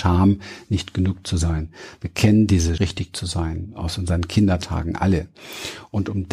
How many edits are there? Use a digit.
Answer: 1